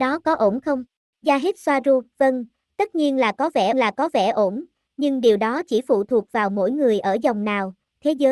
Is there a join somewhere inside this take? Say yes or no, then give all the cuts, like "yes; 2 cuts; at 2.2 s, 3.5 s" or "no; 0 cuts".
yes; 2 cuts; at 1.1 s, 3.7 s